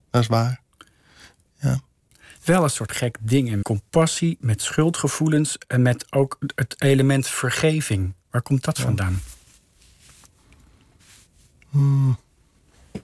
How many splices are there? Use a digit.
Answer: 2